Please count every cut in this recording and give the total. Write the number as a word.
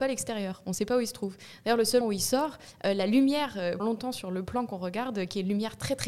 two